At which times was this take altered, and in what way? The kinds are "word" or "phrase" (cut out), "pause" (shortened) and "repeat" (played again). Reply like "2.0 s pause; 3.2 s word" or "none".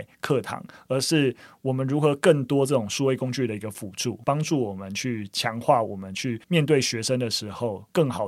6.4 s pause